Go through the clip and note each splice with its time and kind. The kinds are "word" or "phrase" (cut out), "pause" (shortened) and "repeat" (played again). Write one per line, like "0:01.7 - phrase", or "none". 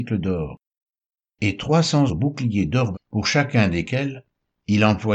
0:02.1 - word
0:02.9 - word